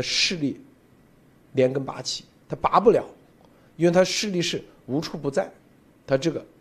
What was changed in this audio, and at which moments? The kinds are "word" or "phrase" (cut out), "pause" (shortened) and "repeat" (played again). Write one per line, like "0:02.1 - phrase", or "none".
none